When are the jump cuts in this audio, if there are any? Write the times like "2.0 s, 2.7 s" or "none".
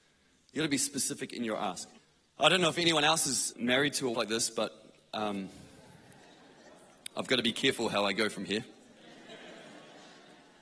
2.0 s, 3.5 s, 4.1 s